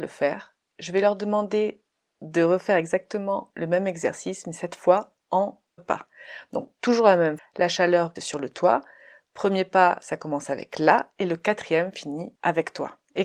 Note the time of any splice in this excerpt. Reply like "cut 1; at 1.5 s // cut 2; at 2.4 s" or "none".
cut 1; at 5.8 s // cut 2; at 7.4 s // cut 3; at 8.2 s